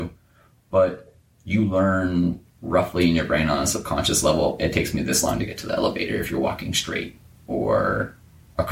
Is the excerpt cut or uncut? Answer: uncut